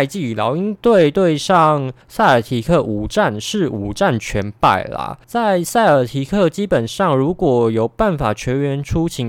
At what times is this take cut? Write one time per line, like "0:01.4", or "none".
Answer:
0:02.0
0:05.2